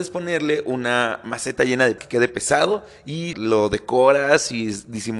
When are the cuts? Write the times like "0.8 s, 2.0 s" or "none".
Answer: 2.0 s, 3.3 s